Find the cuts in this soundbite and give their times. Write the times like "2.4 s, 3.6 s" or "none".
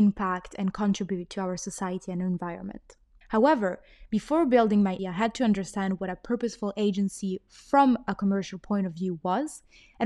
3.2 s, 5.0 s